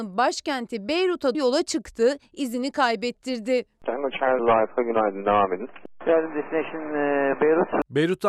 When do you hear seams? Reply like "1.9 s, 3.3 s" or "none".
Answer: 1.3 s, 4.4 s